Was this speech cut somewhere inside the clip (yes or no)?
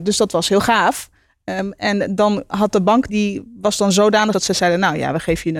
yes